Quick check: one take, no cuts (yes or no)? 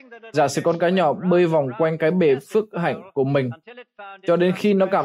yes